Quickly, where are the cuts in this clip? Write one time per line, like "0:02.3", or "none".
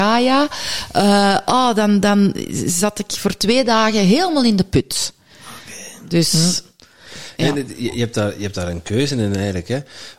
none

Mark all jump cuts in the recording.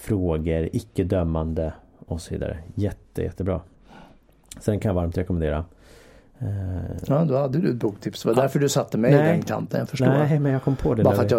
none

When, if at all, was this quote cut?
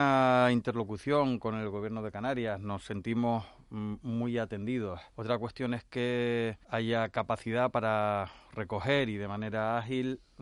0:05.1
0:06.6

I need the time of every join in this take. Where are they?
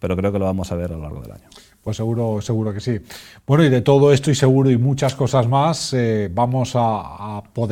none

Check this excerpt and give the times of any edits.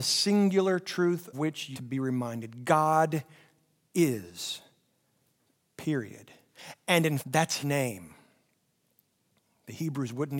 0:01.3
0:01.7
0:07.2
0:07.6

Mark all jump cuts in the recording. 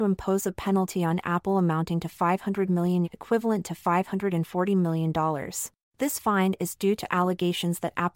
0:03.0
0:05.8

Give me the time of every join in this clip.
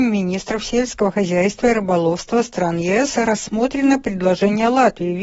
none

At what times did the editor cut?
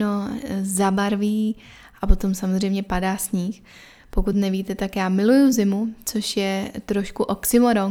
none

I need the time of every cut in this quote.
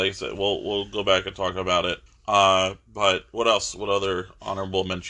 0:02.1

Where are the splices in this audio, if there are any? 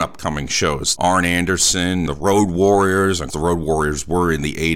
0:01.0
0:02.1
0:03.3

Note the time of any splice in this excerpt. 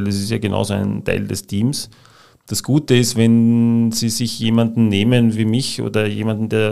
none

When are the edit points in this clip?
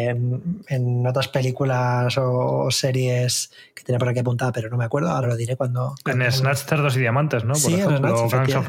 0:05.2

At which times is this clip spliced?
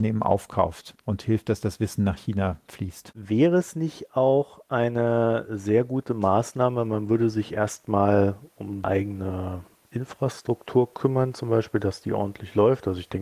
0:08.8

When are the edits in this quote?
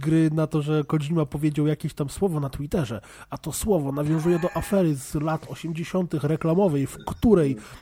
none

